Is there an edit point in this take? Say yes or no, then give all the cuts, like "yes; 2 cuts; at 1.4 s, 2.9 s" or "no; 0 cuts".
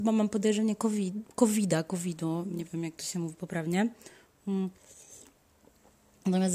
no; 0 cuts